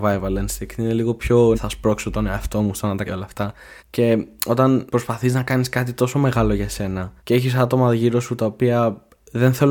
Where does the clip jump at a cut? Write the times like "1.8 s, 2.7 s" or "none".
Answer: 1.5 s, 3.1 s, 3.8 s, 4.9 s, 7.2 s